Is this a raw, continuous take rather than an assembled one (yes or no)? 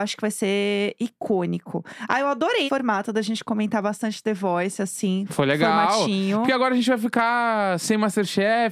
no